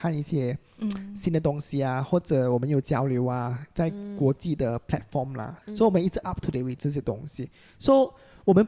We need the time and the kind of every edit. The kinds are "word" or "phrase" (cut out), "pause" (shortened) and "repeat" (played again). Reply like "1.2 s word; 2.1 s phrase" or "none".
5.6 s pause